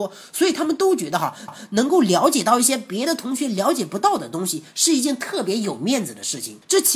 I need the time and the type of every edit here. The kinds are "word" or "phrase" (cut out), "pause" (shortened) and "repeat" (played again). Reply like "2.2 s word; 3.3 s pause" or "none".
1.5 s repeat